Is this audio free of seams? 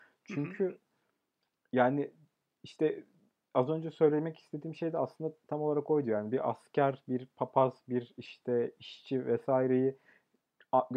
yes; 0 cuts

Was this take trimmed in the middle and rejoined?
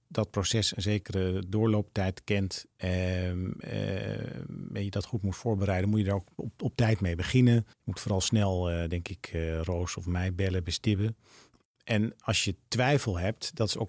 yes; 1 cut; at 7.7 s

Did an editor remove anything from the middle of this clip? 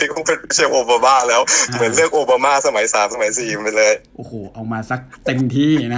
no; 0 cuts

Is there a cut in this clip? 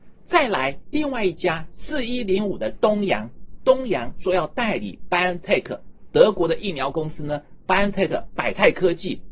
no; 0 cuts

